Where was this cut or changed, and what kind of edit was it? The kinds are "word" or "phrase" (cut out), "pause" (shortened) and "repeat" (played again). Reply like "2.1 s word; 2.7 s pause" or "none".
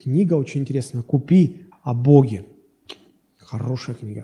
1.7 s word